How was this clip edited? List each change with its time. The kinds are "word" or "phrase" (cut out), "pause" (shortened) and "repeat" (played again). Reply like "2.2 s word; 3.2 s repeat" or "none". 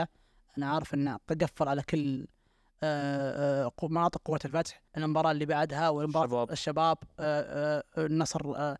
4.9 s pause